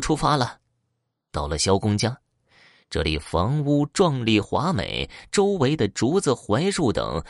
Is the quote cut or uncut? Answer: uncut